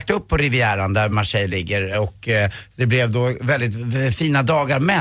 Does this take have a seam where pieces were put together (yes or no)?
no